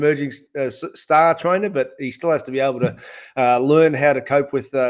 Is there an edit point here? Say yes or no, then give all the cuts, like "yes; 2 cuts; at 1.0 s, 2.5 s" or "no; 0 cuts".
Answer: no; 0 cuts